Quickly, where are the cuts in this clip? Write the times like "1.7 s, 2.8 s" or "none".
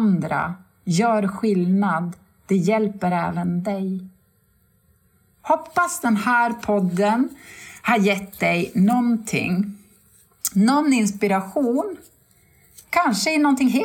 none